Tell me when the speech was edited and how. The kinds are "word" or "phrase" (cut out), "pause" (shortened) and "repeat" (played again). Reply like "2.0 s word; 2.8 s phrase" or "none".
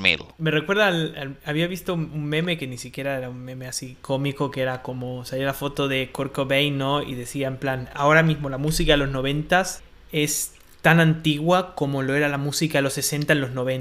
9.8 s pause